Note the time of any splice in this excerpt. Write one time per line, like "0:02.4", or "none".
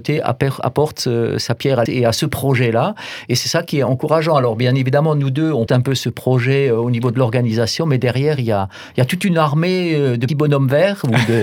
0:01.9
0:05.7
0:10.3